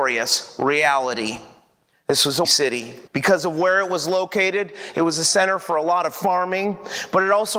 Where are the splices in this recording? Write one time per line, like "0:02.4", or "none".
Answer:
0:02.4
0:03.1